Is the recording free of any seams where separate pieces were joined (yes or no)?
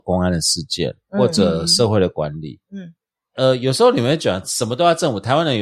no